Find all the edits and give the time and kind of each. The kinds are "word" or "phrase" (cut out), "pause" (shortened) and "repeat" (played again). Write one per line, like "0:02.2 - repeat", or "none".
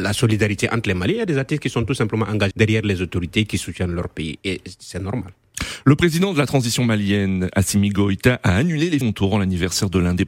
0:02.5 - word
0:09.0 - word